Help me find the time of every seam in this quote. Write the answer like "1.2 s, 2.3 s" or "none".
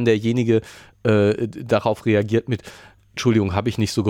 none

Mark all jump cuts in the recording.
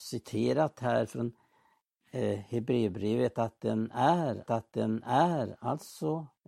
4.5 s

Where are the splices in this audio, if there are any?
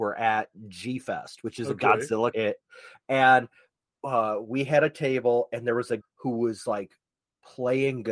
2.3 s, 6.0 s

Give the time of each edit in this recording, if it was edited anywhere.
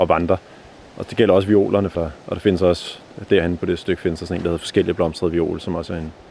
1.9 s

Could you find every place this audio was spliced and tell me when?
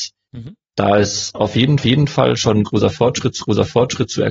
1.8 s, 3.4 s

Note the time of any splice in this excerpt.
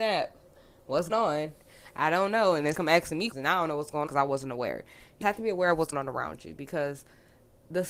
1.1 s, 2.7 s, 3.3 s, 4.1 s, 5.2 s, 5.9 s

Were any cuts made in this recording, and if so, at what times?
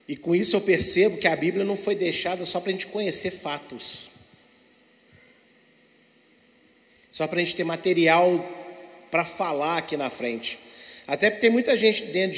none

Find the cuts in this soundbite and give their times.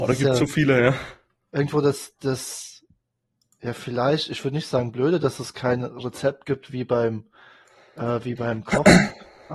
none

